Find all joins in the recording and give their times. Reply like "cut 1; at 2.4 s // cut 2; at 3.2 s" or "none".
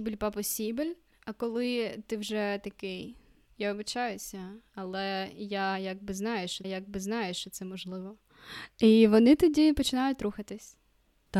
cut 1; at 6.6 s // cut 2; at 8.7 s